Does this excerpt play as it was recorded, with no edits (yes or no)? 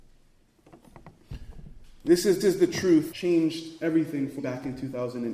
no